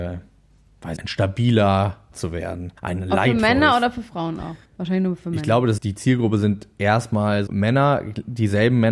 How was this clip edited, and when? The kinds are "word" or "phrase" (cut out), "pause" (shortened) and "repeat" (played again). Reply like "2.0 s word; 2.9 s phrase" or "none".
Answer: 1.0 s word; 2.1 s word; 2.8 s pause; 4.6 s pause; 5.8 s word; 7.5 s word